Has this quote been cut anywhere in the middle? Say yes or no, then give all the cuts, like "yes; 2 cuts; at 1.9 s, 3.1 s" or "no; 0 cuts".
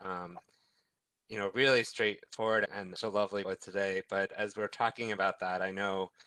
yes; 3 cuts; at 2.7 s, 3.0 s, 3.4 s